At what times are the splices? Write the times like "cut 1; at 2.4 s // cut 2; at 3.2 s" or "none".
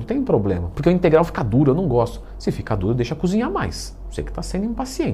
none